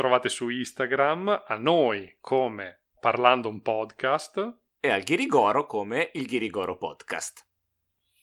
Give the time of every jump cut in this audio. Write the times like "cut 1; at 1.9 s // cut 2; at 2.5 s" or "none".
none